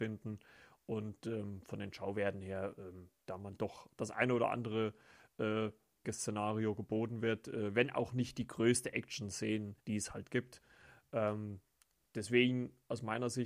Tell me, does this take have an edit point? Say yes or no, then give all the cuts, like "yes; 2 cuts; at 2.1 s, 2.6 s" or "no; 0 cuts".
yes; 3 cuts; at 3.9 s, 6.0 s, 9.8 s